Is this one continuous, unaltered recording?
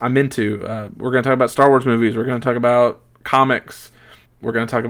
yes; 0 cuts

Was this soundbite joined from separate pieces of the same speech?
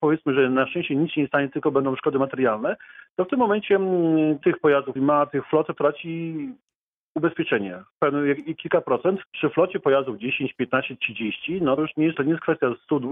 yes; 6 cuts; at 4.4 s, 5.0 s, 5.8 s, 9.3 s, 11.8 s, 12.1 s

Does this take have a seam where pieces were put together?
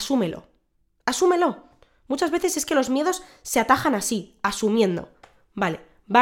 no; 0 cuts

